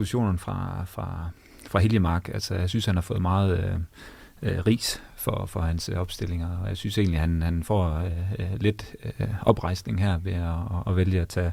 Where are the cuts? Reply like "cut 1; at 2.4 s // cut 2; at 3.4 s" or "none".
none